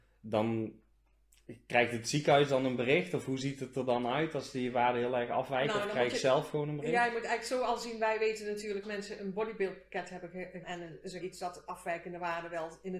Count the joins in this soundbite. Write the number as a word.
three